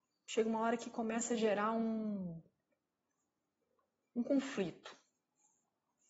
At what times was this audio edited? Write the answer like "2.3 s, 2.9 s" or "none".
none